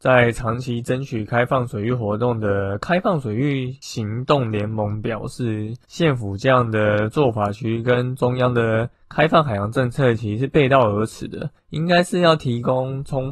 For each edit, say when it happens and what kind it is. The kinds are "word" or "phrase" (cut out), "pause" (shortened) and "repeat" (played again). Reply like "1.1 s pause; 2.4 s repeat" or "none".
9.0 s pause